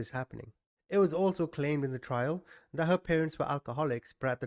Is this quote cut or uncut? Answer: uncut